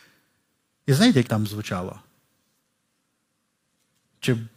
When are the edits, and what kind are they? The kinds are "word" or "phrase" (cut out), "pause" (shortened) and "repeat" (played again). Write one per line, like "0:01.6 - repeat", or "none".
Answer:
0:01.3 - word